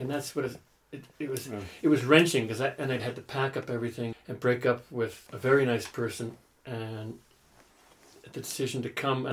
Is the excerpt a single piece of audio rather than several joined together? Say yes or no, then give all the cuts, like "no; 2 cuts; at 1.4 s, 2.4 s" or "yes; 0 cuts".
no; 4 cuts; at 1.1 s, 3.0 s, 4.1 s, 5.3 s